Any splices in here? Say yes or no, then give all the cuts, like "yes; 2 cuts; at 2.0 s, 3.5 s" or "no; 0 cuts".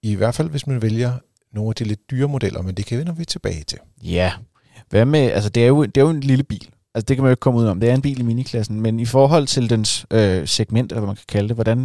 no; 0 cuts